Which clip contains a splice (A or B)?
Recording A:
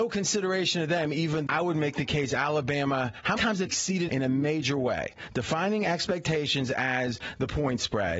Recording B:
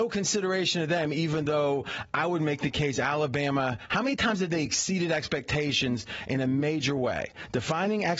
A